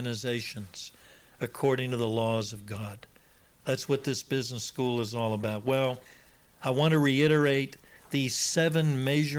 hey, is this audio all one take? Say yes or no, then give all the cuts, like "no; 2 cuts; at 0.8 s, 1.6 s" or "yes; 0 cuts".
yes; 0 cuts